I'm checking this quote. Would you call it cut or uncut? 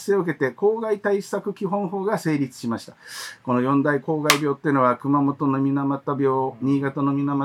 uncut